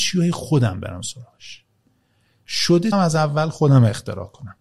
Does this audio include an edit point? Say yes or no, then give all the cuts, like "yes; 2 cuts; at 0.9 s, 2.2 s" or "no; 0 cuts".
yes; 1 cut; at 2.9 s